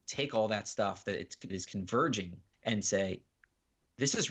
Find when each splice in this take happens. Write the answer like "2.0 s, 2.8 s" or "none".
1.5 s, 2.5 s